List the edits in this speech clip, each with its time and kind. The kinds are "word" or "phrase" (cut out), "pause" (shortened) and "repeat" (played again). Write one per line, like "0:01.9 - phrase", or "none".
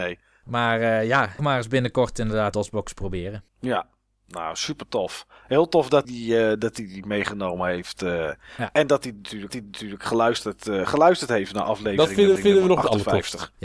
0:01.4 - phrase
0:02.5 - word
0:03.5 - pause
0:06.0 - word
0:09.5 - repeat
0:12.4 - repeat